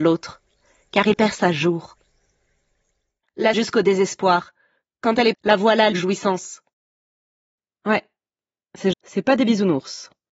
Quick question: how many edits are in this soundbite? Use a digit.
5